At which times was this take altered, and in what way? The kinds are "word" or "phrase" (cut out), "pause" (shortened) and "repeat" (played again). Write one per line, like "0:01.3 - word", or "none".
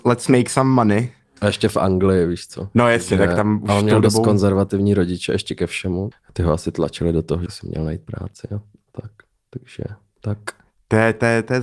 0:06.1 - word
0:07.5 - phrase